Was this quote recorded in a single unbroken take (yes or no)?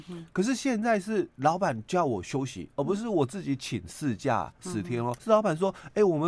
no